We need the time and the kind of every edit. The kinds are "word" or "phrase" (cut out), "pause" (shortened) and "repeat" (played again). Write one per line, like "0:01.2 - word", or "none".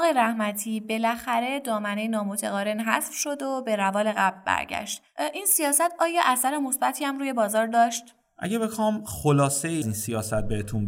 0:09.8 - word

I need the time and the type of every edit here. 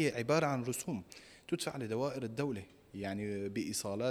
none

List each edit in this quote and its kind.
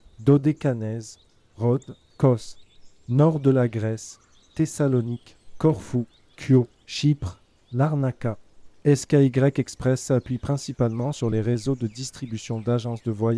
0:06.7 - pause

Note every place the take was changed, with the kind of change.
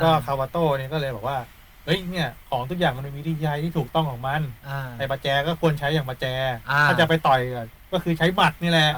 none

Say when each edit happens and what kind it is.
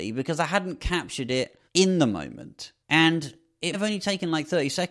0:01.7 - pause
0:02.8 - pause
0:03.7 - word

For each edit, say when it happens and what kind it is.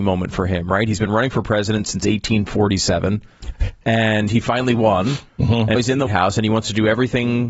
0:05.8 - word
0:06.1 - word

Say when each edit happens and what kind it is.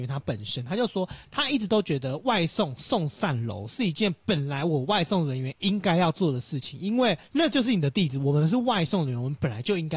0:07.2 - pause

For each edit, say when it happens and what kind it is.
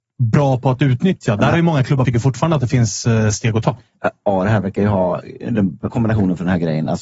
0:02.0 - phrase
0:05.9 - word

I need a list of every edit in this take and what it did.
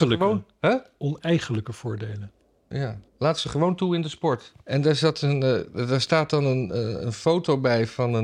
0:03.1 - pause
0:04.6 - pause

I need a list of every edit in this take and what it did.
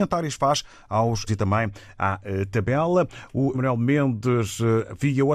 0:01.3 - word
0:03.5 - word

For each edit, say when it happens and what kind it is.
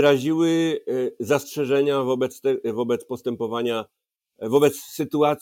none

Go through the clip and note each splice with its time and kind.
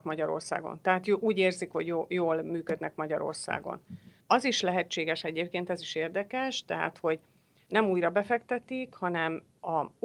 none

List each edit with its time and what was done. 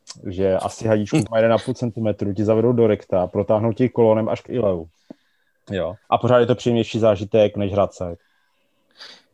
0:01.3 - word
0:04.5 - word
0:06.0 - pause

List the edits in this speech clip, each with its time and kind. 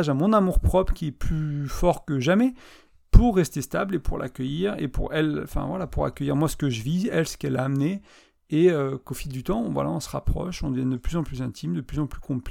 none

